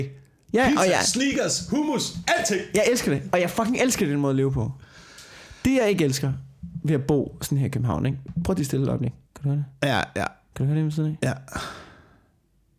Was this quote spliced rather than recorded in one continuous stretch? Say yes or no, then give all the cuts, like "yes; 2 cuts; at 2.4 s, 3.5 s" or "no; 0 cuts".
yes; 1 cut; at 9.2 s